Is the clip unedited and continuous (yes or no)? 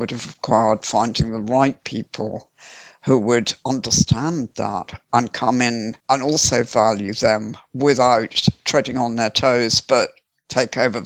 no